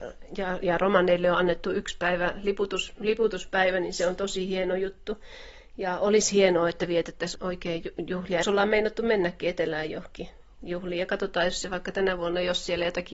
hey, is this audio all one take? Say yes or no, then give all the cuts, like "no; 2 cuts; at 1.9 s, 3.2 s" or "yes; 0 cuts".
no; 2 cuts; at 7.4 s, 8.4 s